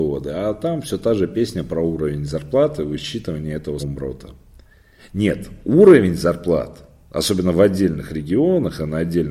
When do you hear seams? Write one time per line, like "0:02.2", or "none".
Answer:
0:03.8